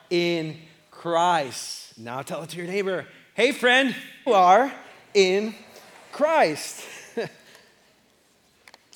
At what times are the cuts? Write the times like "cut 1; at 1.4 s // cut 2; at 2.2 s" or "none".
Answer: cut 1; at 4.3 s